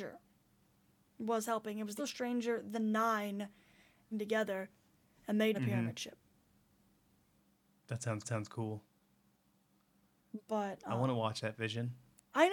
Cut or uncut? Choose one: cut